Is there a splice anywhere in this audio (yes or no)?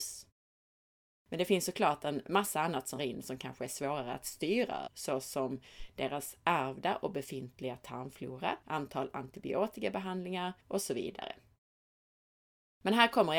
yes